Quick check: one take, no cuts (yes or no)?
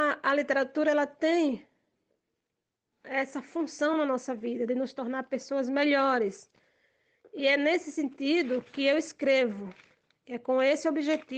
yes